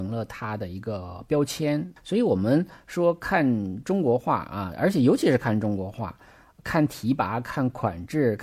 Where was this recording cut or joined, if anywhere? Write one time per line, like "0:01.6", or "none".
none